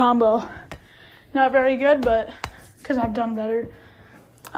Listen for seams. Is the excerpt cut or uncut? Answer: uncut